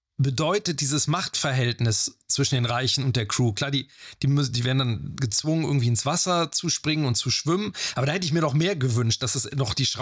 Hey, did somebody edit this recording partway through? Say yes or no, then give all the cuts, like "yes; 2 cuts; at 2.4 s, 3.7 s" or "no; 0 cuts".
no; 0 cuts